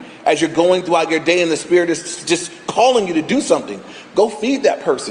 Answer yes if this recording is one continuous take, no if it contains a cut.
yes